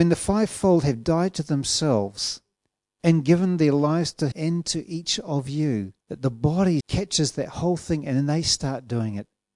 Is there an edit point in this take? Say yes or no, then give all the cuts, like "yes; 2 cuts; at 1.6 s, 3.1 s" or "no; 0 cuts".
yes; 4 cuts; at 2.6 s, 4.3 s, 6.0 s, 6.8 s